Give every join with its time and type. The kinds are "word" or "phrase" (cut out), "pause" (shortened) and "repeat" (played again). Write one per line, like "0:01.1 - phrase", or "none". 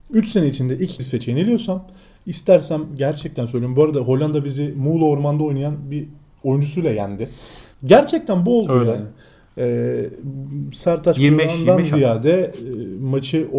0:01.0 - word
0:07.7 - pause